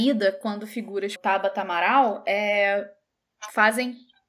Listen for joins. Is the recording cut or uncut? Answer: cut